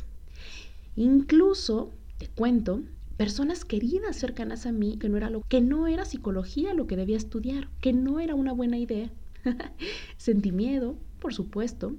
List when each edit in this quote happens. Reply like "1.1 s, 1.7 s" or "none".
4.2 s, 5.0 s, 5.4 s